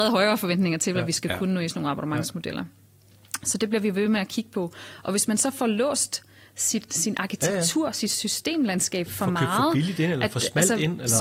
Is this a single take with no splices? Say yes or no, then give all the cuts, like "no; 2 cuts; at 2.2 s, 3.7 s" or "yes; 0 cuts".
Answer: yes; 0 cuts